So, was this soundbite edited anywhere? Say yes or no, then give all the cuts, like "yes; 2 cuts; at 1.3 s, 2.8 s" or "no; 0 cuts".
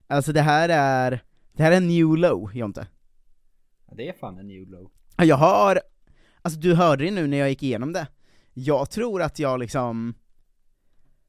no; 0 cuts